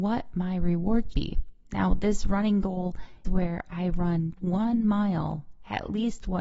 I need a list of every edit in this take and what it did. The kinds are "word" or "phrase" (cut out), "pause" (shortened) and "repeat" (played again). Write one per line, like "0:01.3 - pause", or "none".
0:01.1 - word
0:03.2 - word
0:04.4 - word